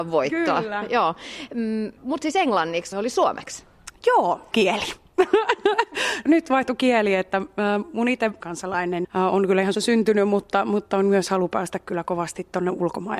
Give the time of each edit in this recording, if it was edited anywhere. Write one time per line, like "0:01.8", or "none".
0:02.0
0:02.9
0:04.5
0:06.3
0:08.4
0:09.0
0:09.7